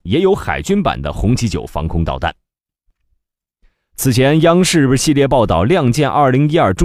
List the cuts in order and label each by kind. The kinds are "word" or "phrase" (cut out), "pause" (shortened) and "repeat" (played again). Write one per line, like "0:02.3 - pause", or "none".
none